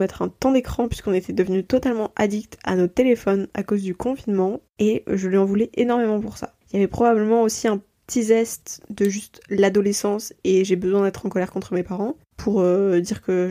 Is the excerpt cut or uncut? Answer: cut